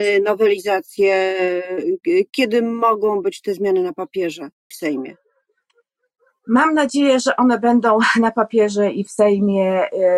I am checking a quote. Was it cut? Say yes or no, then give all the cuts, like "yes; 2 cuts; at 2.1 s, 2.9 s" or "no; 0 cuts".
yes; 1 cut; at 4.7 s